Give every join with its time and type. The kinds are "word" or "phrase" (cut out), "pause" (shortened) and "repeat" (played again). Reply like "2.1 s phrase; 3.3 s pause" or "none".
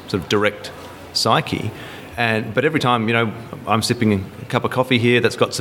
none